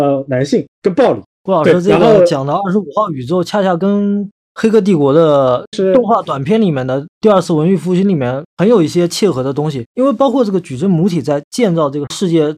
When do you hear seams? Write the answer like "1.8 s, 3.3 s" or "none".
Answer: 1.3 s